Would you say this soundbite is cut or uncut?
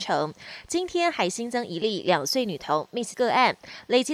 cut